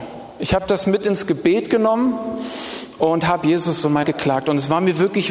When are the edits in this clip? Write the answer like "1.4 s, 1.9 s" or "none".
4.0 s